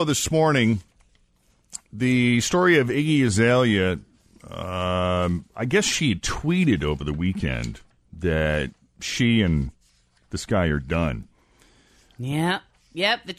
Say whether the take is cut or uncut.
uncut